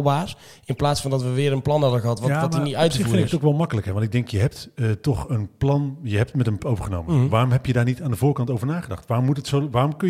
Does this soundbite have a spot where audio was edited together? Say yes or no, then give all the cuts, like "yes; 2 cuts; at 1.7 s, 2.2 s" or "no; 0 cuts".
yes; 1 cut; at 6.6 s